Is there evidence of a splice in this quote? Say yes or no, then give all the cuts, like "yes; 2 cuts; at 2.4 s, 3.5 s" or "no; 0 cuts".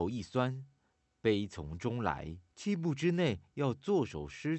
yes; 1 cut; at 2.5 s